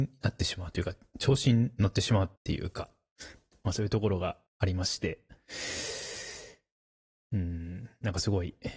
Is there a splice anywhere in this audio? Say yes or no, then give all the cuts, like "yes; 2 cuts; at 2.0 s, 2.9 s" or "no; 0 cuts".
yes; 2 cuts; at 2.4 s, 4.5 s